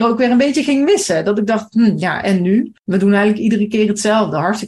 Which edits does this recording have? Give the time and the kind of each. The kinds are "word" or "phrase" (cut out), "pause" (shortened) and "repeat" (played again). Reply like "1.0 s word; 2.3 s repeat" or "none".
2.8 s pause